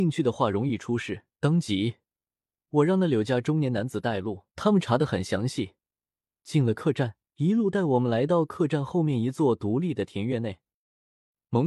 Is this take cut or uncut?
cut